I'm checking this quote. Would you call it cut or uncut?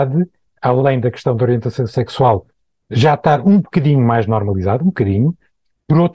uncut